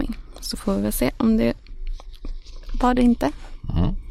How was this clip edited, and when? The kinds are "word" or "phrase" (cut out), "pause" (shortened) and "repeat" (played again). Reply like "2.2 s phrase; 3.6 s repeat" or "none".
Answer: 3.0 s word